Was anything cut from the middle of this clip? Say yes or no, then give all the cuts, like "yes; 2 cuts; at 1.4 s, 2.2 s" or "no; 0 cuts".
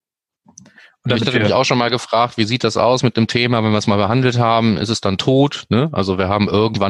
no; 0 cuts